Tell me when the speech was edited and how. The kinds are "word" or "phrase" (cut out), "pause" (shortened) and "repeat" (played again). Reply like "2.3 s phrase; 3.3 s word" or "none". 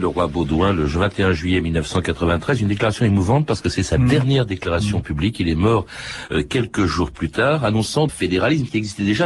8.1 s phrase